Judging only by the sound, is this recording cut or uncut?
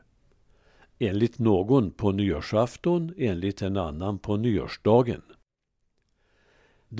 uncut